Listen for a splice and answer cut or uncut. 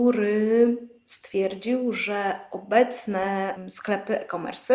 uncut